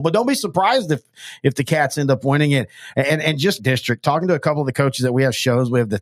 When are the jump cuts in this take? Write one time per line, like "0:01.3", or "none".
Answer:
0:03.6